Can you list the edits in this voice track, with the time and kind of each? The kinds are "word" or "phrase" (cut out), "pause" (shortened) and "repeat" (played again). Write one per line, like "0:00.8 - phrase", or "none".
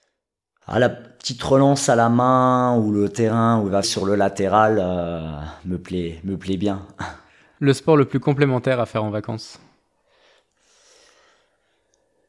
0:03.8 - word